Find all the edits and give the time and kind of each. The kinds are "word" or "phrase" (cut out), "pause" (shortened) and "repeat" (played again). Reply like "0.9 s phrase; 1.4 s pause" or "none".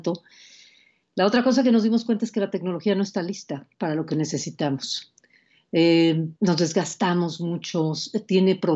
6.4 s pause